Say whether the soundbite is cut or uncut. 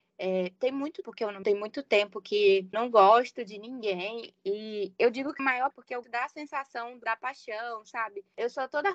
cut